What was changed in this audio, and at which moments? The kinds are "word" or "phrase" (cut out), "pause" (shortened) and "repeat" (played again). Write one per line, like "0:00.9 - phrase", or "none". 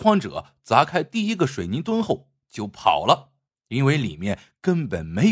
0:03.5 - pause